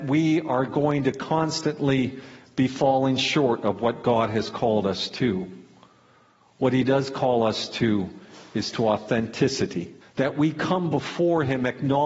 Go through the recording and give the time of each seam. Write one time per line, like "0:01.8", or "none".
0:10.0